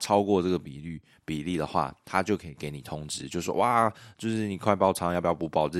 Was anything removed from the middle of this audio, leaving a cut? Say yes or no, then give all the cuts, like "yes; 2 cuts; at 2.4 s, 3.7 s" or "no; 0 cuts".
no; 0 cuts